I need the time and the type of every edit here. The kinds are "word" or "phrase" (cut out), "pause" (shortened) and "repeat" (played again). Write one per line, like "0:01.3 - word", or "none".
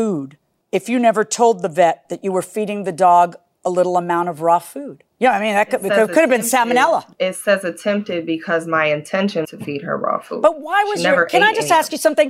0:05.1 - pause
0:09.4 - word